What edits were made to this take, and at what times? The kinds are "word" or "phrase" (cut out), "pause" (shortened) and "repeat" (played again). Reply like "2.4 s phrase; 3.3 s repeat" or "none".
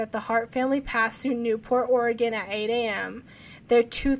none